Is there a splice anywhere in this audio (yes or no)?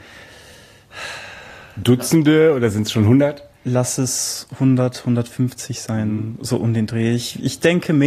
no